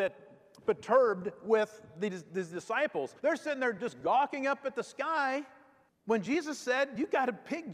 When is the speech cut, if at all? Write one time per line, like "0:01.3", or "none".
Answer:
0:03.2